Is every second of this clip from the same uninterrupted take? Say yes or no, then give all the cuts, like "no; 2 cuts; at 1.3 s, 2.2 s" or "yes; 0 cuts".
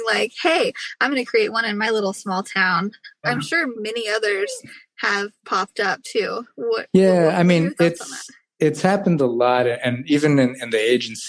yes; 0 cuts